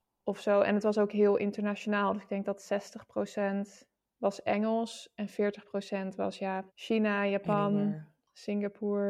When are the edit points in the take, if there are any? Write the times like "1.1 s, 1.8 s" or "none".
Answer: 4.0 s, 6.7 s